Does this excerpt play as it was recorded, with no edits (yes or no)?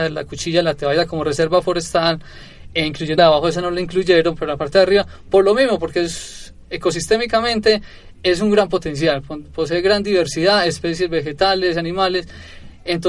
no